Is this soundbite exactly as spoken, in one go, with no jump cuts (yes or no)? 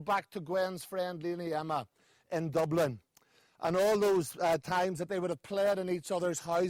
yes